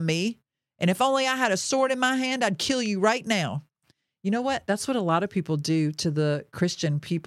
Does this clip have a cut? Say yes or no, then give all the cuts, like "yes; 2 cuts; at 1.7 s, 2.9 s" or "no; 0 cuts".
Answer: no; 0 cuts